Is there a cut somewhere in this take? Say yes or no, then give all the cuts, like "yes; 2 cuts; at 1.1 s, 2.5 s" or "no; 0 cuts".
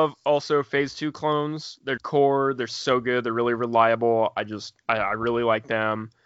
yes; 1 cut; at 2.0 s